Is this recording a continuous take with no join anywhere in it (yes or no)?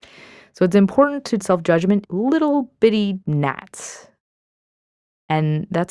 no